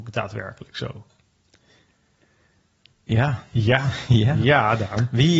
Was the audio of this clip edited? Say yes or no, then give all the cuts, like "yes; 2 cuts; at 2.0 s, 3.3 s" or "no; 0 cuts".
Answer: no; 0 cuts